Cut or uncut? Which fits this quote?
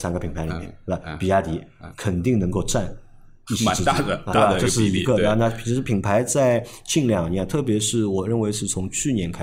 cut